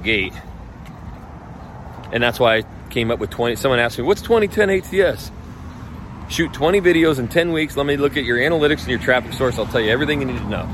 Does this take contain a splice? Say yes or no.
no